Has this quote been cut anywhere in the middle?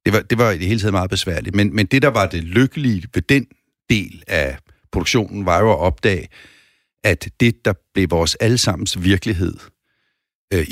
no; 0 cuts

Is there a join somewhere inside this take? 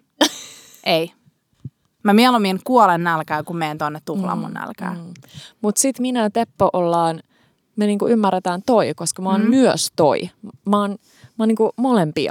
no; 0 cuts

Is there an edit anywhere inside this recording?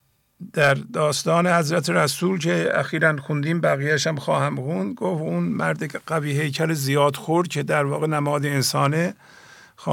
no; 0 cuts

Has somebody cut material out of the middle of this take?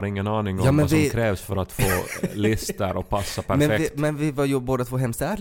no; 0 cuts

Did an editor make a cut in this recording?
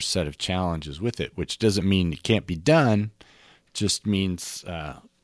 no; 0 cuts

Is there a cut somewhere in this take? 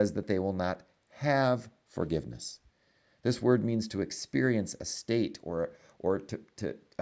no; 0 cuts

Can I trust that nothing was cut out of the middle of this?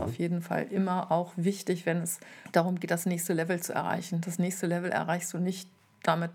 yes; 0 cuts

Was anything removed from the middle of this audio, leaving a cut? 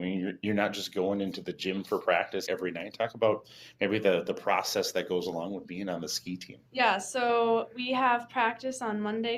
yes; 2 cuts; at 2.5 s, 6.7 s

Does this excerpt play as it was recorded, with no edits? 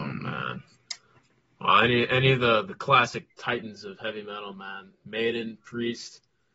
yes; 0 cuts

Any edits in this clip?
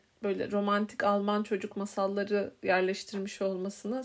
no; 0 cuts

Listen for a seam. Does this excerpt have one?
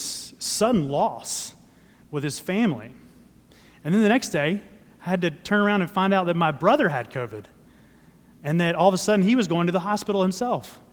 no; 0 cuts

